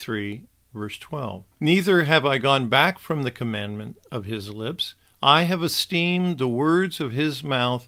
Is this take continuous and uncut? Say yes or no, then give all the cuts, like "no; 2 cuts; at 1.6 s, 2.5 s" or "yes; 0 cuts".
no; 2 cuts; at 1.5 s, 5.0 s